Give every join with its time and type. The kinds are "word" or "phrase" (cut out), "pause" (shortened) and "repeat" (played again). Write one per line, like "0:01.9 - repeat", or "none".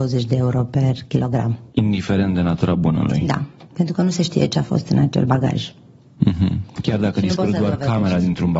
0:01.7 - pause